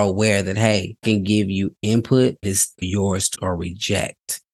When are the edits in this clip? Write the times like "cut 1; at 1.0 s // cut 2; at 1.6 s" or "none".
cut 1; at 1.0 s // cut 2; at 2.4 s // cut 3; at 2.8 s // cut 4; at 3.3 s